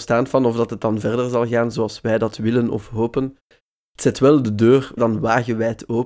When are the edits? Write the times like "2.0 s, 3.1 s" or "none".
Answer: 5.0 s

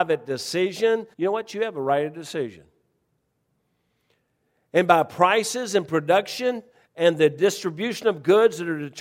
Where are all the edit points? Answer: 1.1 s, 6.7 s

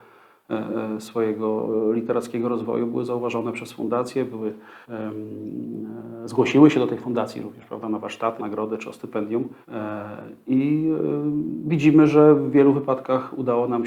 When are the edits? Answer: 4.8 s, 8.4 s, 9.6 s

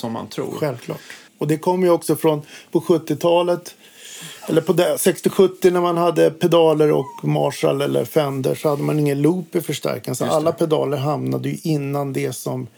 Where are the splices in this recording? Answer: 1.3 s

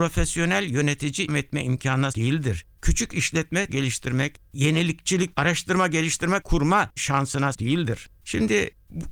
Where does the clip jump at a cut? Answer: 1.3 s, 2.1 s, 3.7 s, 5.3 s, 6.4 s, 7.0 s, 7.5 s

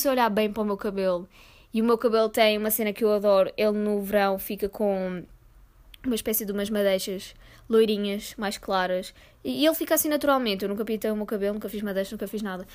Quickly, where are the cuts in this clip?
none

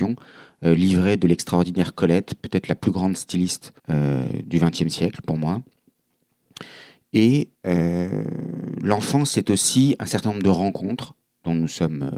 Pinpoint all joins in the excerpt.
3.8 s, 7.5 s, 11.3 s

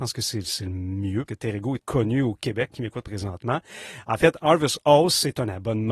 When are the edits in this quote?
1.3 s, 1.8 s, 2.7 s

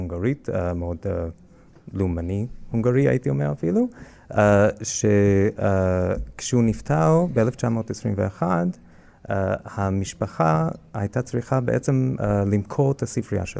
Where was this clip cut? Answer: none

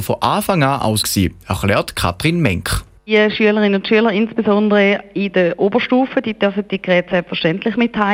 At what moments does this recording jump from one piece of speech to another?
1.0 s

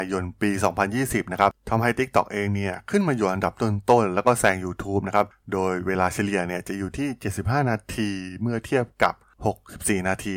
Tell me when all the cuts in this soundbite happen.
none

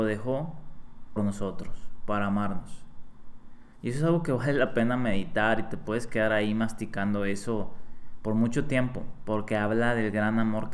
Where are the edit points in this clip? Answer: 1.2 s

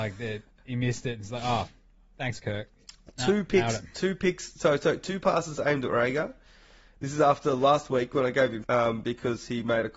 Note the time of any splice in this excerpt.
8.6 s

